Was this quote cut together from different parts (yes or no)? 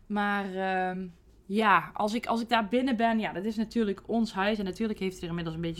no